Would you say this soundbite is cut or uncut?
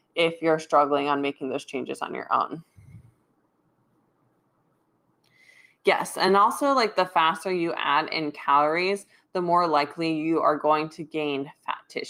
uncut